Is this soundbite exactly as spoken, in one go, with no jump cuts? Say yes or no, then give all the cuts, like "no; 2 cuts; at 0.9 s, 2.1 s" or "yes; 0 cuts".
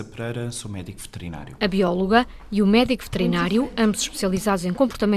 yes; 0 cuts